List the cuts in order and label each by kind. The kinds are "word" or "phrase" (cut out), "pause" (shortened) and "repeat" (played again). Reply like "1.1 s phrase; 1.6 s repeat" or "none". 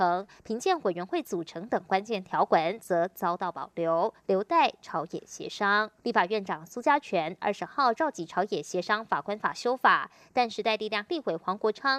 6.0 s pause